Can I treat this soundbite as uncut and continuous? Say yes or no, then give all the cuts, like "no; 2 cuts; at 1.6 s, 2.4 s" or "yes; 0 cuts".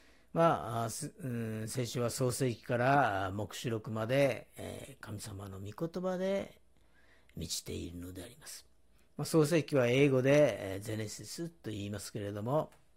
yes; 0 cuts